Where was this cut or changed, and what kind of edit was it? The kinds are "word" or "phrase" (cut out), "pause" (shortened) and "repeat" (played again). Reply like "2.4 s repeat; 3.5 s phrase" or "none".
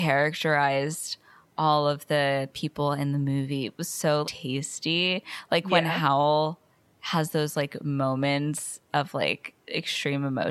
4.2 s word